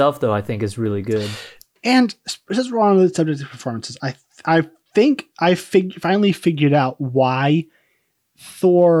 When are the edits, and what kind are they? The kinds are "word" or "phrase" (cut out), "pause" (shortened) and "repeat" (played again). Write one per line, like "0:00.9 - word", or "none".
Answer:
none